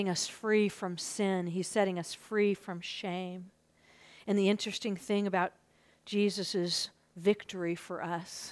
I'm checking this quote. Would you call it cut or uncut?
uncut